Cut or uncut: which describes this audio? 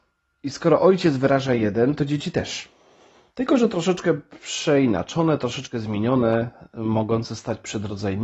uncut